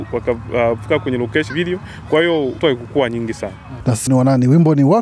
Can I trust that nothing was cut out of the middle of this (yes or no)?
no